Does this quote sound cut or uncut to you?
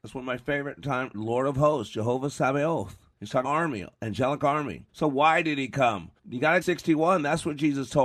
cut